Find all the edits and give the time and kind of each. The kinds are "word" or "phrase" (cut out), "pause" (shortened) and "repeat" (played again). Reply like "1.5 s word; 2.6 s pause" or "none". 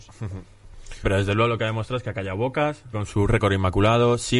1.0 s word; 2.9 s word